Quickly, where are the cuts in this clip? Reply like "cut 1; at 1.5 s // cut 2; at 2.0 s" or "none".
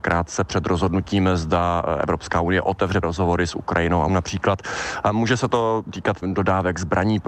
cut 1; at 3.0 s // cut 2; at 4.1 s // cut 3; at 6.2 s